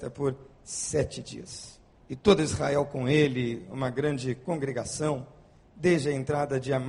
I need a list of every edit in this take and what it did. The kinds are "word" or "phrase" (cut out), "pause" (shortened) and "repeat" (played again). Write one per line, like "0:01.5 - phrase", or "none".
0:01.9 - pause